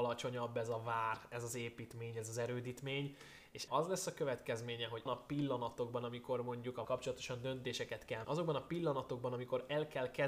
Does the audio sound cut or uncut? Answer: cut